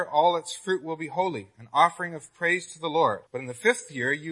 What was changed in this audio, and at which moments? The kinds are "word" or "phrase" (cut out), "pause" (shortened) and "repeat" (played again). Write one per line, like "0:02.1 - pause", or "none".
0:03.3 - pause